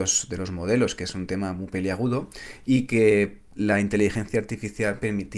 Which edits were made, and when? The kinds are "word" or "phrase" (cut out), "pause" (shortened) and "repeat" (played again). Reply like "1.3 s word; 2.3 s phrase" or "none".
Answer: none